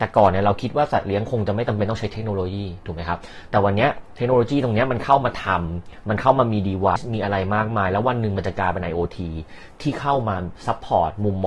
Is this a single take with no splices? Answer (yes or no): no